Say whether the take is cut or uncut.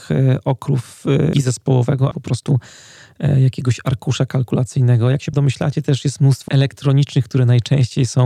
cut